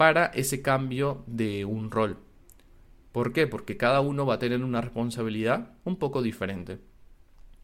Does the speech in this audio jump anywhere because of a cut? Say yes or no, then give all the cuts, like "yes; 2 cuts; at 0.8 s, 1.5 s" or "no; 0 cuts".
no; 0 cuts